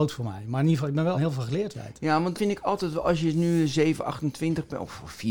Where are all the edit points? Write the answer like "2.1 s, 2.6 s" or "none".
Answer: 1.1 s, 1.7 s, 2.3 s